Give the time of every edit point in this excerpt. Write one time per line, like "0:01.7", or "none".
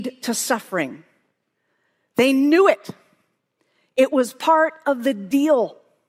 none